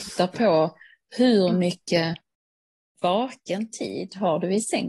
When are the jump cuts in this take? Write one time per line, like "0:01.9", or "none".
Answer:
none